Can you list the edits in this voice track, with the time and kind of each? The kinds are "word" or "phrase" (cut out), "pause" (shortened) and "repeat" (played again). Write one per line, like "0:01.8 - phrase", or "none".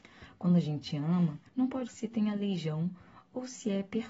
0:01.5 - pause
0:01.9 - word